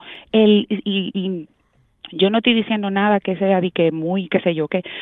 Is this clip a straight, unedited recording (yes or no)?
yes